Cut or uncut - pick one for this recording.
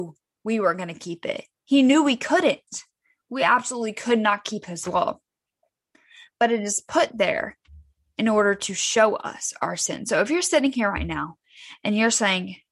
uncut